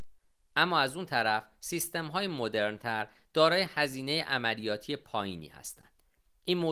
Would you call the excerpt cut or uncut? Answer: uncut